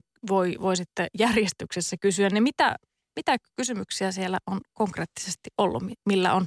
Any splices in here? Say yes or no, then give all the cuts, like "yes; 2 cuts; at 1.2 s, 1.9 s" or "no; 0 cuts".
no; 0 cuts